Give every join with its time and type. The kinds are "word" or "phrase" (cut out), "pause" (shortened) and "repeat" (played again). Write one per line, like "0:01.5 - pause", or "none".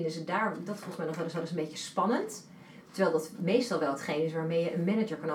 0:01.3 - repeat